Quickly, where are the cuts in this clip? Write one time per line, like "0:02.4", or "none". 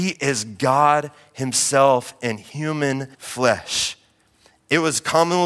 0:03.1

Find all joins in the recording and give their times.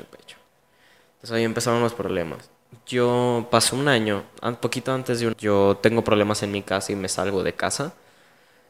0:05.3

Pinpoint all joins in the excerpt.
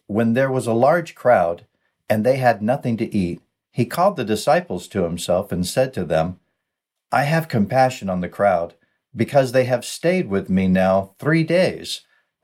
none

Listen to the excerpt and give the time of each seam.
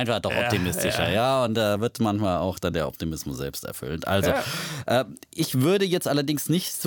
none

